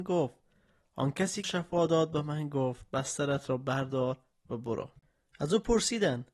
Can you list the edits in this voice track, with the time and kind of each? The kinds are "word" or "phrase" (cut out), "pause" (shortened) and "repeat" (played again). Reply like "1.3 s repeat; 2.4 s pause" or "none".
1.4 s phrase